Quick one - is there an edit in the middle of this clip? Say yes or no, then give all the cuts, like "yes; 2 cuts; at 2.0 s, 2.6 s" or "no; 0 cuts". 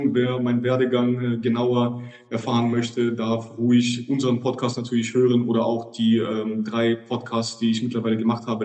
no; 0 cuts